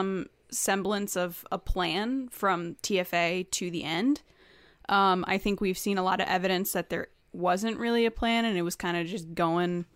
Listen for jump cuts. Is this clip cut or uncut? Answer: uncut